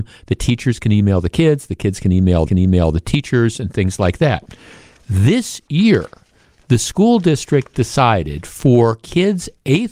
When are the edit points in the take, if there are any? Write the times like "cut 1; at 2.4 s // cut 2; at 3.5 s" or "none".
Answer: cut 1; at 2.5 s